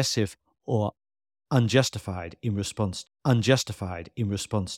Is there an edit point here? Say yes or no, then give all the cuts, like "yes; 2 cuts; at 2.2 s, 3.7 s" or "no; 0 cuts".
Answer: yes; 1 cut; at 3.0 s